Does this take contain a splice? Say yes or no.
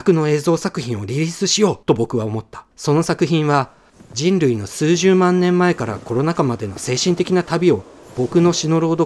yes